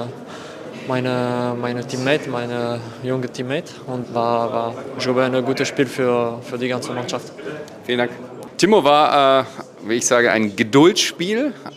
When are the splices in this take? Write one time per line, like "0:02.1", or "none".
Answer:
0:04.0